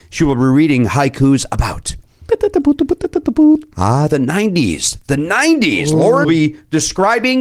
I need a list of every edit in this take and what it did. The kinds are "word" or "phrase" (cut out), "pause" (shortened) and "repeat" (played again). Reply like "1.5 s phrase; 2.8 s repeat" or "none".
6.2 s word